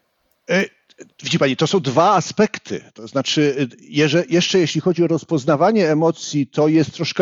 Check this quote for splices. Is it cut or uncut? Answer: cut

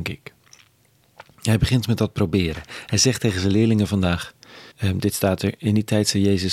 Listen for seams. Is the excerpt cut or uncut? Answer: cut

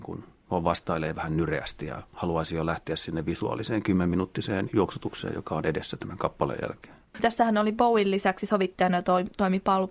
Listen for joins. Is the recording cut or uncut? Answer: uncut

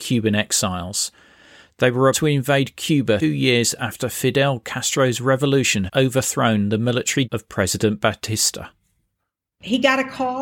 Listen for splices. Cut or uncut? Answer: cut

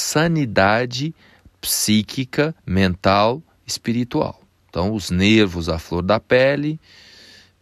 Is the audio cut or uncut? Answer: cut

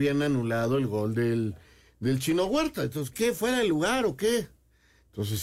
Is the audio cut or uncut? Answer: cut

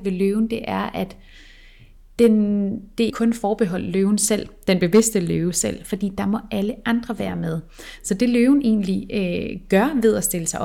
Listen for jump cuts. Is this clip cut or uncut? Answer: cut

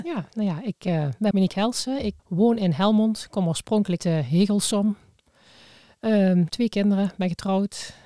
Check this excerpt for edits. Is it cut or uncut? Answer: cut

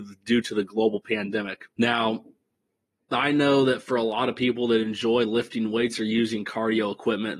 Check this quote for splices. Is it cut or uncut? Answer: cut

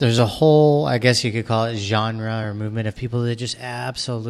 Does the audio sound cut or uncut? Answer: uncut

